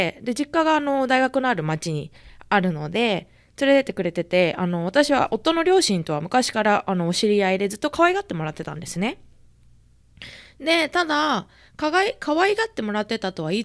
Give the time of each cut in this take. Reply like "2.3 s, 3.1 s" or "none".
none